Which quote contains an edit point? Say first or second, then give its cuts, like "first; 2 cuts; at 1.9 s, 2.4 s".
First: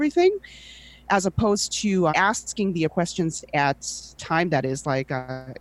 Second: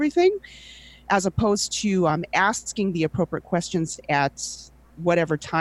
first; 3 cuts; at 2.1 s, 2.9 s, 4.2 s